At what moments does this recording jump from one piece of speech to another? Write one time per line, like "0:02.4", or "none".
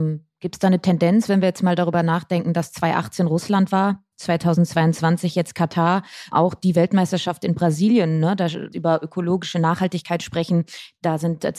0:06.3
0:08.7